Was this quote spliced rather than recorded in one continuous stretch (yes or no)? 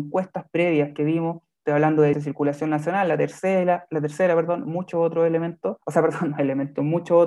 yes